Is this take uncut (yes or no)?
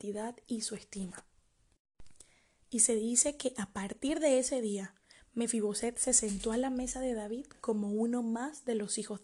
yes